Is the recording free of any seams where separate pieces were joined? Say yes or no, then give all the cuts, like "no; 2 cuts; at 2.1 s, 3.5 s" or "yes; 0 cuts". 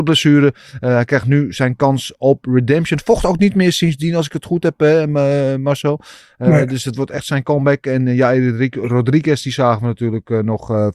yes; 0 cuts